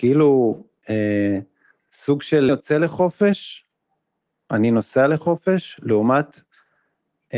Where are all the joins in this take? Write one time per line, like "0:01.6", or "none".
0:01.7
0:02.5